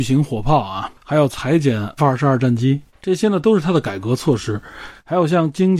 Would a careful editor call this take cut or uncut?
cut